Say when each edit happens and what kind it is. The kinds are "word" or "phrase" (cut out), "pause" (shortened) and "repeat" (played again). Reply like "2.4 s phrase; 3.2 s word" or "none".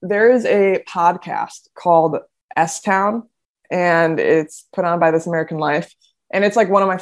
none